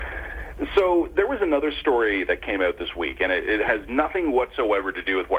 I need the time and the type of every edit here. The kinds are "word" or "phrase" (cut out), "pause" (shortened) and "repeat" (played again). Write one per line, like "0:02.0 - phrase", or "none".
none